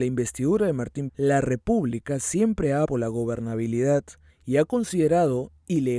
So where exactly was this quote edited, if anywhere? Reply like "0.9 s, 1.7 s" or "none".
1.1 s, 2.8 s, 4.3 s